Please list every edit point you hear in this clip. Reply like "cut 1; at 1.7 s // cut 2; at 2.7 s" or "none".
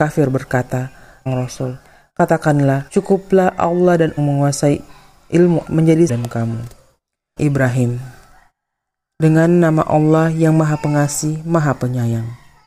cut 1; at 1.3 s // cut 2; at 2.9 s // cut 3; at 4.2 s // cut 4; at 5.6 s // cut 5; at 6.1 s // cut 6; at 7.4 s